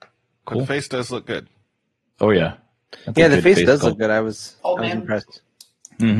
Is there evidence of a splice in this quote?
yes; 1 cut; at 4.6 s

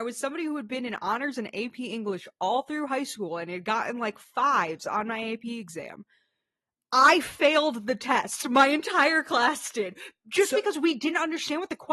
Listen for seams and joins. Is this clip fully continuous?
yes; 0 cuts

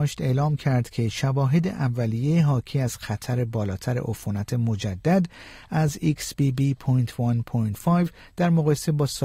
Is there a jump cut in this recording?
no; 0 cuts

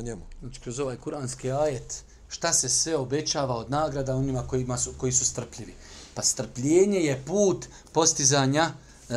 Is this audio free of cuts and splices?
yes; 0 cuts

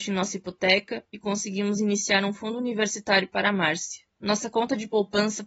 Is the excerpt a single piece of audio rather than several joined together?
yes; 0 cuts

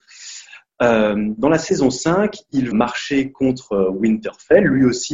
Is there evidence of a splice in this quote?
yes; 1 cut; at 2.7 s

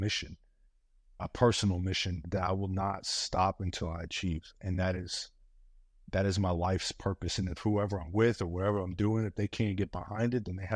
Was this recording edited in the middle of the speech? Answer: no; 0 cuts

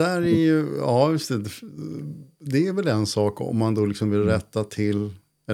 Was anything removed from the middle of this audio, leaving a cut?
no; 0 cuts

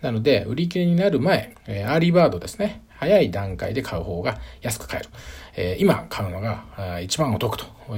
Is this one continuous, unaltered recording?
no; 1 cut; at 1.5 s

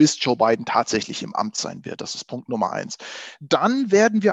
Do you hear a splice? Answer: no; 0 cuts

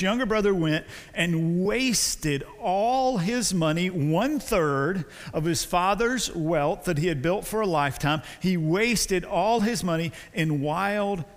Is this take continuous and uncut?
yes; 0 cuts

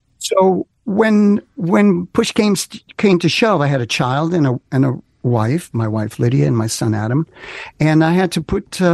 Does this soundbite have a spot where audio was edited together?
no; 0 cuts

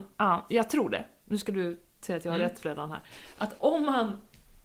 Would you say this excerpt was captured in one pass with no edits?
yes; 0 cuts

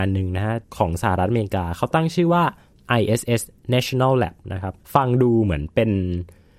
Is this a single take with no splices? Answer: no; 1 cut; at 4.8 s

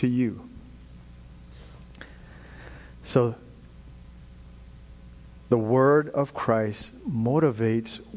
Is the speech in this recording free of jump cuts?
yes; 0 cuts

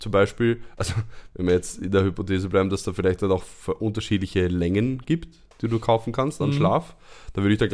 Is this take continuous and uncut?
no; 1 cut; at 5.5 s

